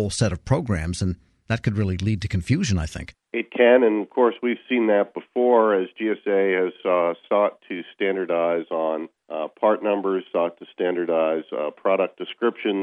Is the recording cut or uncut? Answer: cut